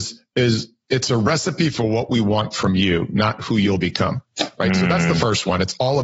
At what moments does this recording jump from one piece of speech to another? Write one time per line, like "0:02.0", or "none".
none